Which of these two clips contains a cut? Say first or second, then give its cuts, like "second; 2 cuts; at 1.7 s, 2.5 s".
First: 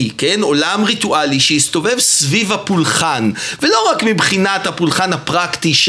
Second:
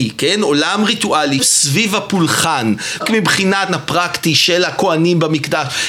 second; 3 cuts; at 1.4 s, 3.0 s, 3.7 s